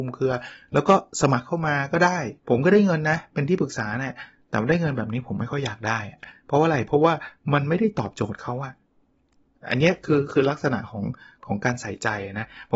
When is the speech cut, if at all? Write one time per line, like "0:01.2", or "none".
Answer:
0:02.4